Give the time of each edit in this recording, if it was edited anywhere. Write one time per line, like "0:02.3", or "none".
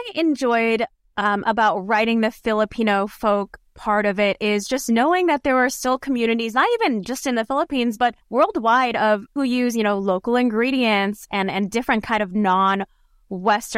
0:08.2
0:09.4